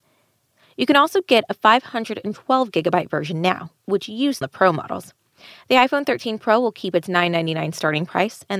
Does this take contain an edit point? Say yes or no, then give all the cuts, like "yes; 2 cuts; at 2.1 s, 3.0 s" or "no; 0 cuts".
yes; 1 cut; at 4.4 s